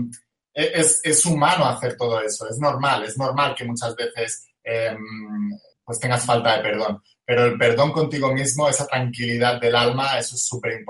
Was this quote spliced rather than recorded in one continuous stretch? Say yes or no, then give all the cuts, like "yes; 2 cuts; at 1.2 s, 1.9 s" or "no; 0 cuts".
yes; 1 cut; at 5.7 s